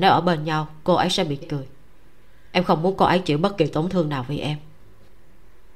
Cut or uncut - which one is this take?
cut